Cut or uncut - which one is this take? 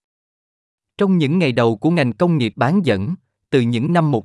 uncut